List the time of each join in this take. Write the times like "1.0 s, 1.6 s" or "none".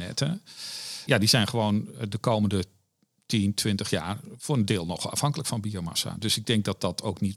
1.1 s